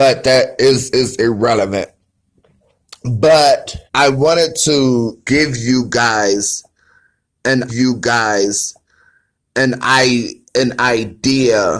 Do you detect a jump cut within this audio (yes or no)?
yes